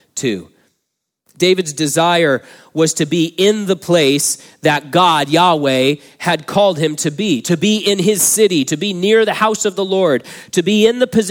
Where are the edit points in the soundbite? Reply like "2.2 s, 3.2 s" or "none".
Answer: none